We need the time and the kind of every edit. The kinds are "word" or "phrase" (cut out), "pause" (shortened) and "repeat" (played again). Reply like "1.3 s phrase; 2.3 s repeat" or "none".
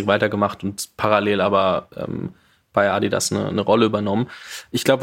none